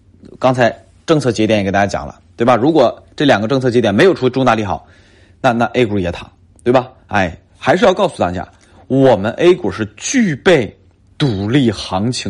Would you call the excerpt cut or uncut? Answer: uncut